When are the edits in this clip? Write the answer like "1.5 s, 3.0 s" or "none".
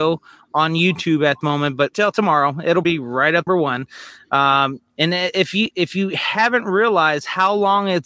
1.4 s, 1.9 s, 2.8 s, 3.5 s, 4.9 s, 5.7 s